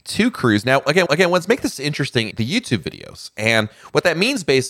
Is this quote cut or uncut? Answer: cut